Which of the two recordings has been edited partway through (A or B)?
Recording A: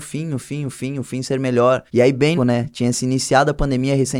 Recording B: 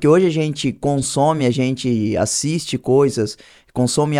A